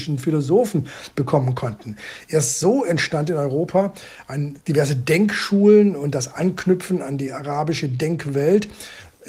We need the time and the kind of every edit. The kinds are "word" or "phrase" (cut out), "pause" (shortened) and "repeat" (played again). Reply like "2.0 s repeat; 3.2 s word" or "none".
4.6 s pause